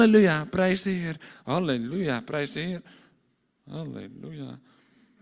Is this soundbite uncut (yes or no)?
yes